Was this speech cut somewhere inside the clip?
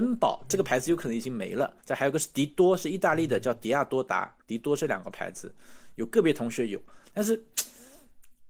yes; 2 cuts; at 1.8 s, 4.4 s

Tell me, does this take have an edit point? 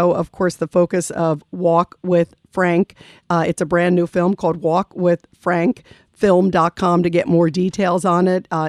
no; 0 cuts

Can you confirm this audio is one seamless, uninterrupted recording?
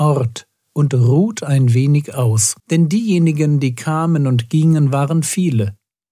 no; 1 cut; at 2.6 s

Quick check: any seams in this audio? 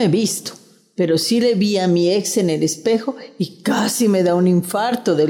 no; 0 cuts

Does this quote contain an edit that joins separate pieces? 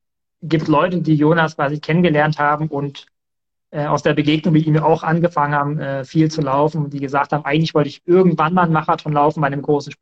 no; 0 cuts

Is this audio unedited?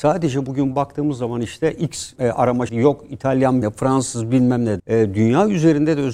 no; 4 cuts; at 2.2 s, 2.7 s, 3.6 s, 4.8 s

